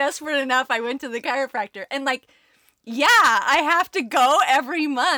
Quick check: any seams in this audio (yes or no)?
no